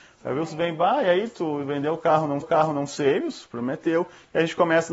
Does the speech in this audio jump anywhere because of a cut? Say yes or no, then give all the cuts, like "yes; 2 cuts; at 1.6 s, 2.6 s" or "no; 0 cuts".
yes; 1 cut; at 2.4 s